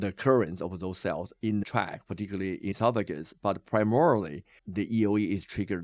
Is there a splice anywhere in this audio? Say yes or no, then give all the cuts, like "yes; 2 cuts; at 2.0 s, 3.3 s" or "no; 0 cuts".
yes; 3 cuts; at 1.6 s, 2.7 s, 4.6 s